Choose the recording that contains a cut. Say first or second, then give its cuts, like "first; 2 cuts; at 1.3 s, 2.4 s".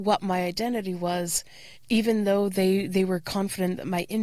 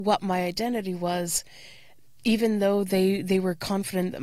first; 1 cut; at 1.7 s